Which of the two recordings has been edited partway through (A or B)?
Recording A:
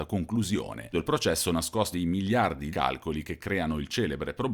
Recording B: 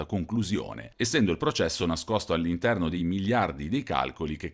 A